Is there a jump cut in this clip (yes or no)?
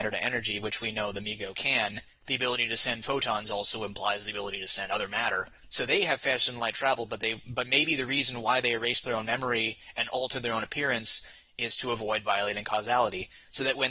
no